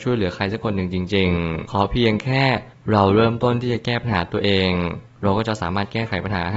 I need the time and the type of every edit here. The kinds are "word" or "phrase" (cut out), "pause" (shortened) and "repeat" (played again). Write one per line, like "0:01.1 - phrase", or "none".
0:01.6 - word